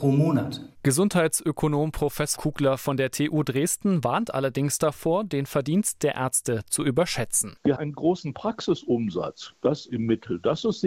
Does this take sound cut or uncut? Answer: cut